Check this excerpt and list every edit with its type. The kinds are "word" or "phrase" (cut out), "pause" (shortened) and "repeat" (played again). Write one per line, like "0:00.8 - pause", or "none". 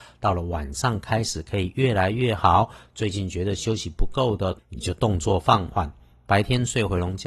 none

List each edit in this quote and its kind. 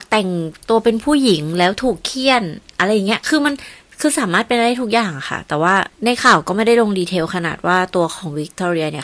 0:05.9 - pause

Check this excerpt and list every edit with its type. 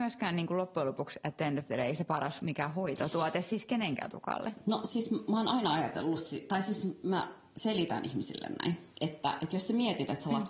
0:08.9 - pause

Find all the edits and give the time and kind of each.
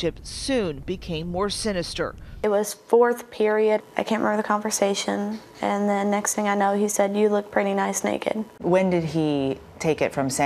0:08.5 - pause

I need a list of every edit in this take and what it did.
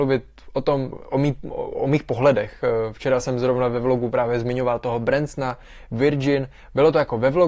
0:00.9 - word

